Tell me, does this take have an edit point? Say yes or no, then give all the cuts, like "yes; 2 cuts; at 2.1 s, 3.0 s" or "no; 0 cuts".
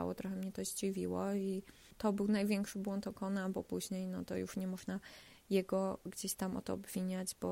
no; 0 cuts